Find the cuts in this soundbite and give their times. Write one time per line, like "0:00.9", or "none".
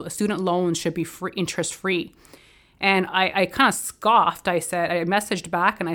none